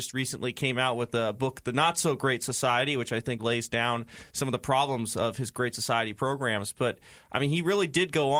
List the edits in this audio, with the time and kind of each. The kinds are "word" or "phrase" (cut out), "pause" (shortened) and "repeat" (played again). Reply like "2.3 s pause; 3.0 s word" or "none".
3.4 s word